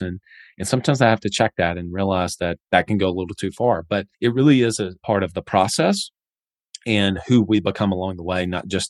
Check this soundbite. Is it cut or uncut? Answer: cut